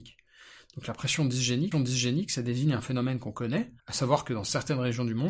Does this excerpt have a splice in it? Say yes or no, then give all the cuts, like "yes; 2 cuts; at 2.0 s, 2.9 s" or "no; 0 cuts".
yes; 2 cuts; at 1.7 s, 3.8 s